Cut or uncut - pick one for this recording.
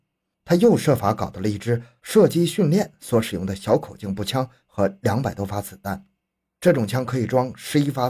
uncut